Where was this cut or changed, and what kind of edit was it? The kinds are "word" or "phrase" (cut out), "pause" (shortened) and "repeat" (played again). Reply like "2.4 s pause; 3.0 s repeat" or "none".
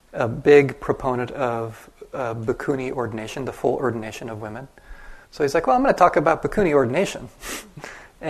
5.2 s pause